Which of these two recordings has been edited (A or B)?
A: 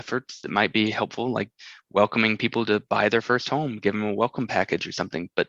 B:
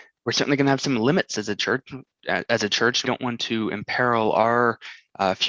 B